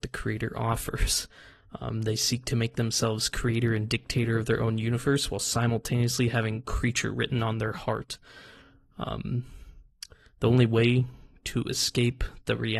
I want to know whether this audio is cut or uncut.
uncut